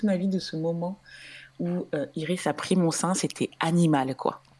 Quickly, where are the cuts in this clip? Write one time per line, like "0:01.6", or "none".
none